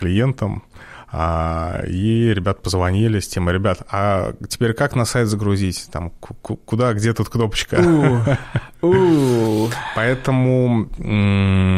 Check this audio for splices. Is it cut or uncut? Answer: uncut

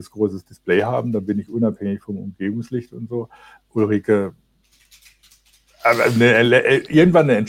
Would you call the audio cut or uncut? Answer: uncut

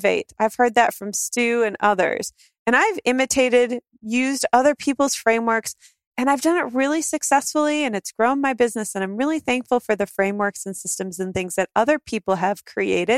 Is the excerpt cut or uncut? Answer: uncut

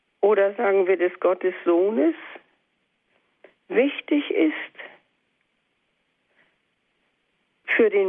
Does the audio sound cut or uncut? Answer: uncut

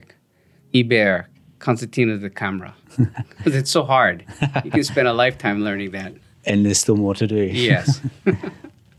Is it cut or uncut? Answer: uncut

